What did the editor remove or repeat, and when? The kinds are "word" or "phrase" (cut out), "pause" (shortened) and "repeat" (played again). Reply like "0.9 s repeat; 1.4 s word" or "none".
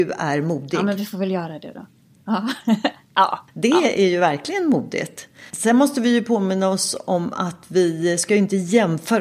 5.5 s pause